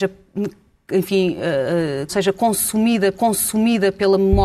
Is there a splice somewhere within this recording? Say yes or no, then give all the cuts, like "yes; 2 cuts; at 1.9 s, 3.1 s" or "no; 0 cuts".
yes; 2 cuts; at 2.1 s, 3.1 s